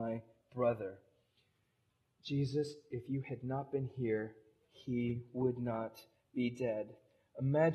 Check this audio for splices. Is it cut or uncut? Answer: uncut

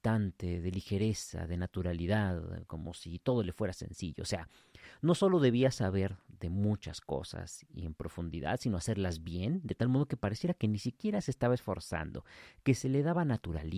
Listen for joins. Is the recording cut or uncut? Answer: uncut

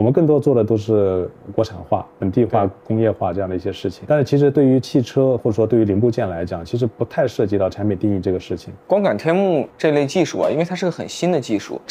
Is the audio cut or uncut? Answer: cut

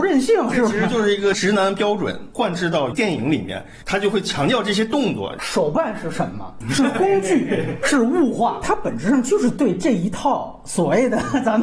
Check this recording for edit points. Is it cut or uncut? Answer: uncut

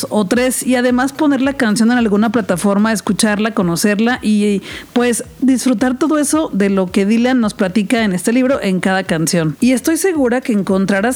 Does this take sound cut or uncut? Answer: uncut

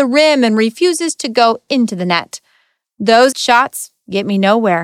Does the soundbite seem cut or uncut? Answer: cut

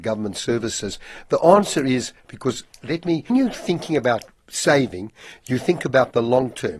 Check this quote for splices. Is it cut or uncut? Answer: cut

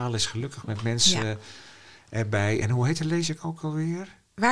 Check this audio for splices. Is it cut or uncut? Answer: uncut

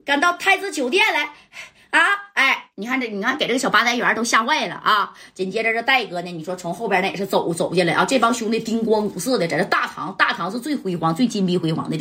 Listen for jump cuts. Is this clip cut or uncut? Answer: uncut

